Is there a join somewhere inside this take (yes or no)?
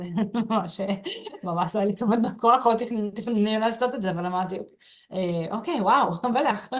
no